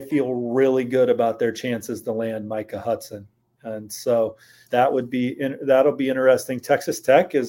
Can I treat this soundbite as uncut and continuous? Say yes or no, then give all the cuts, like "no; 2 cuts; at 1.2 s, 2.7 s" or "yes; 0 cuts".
no; 1 cut; at 4.6 s